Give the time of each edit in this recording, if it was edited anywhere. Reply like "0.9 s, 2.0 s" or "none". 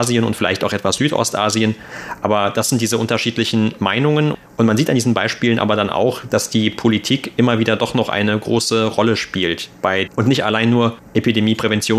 10.1 s

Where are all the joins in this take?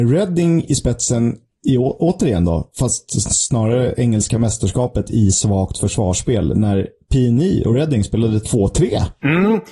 none

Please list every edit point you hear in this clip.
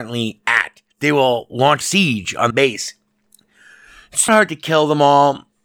0.9 s, 1.8 s, 2.5 s, 4.3 s

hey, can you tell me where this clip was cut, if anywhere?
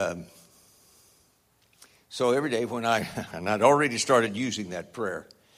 none

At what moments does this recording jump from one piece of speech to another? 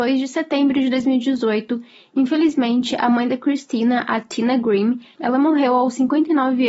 none

